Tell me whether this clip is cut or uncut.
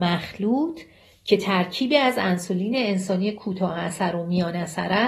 uncut